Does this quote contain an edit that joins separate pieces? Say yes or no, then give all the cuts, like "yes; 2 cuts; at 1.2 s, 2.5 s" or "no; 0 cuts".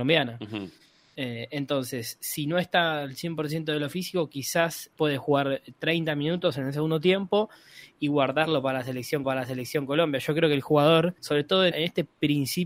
yes; 4 cuts; at 4.9 s, 9.2 s, 11.2 s, 11.7 s